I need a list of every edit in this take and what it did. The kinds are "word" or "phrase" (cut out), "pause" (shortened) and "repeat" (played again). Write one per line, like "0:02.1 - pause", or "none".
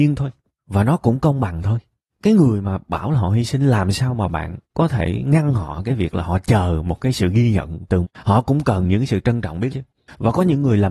0:08.0 - word
0:09.7 - word